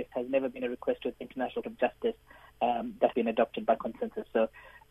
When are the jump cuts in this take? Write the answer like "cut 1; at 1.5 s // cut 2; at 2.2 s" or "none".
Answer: cut 1; at 1.1 s // cut 2; at 1.6 s // cut 3; at 3.1 s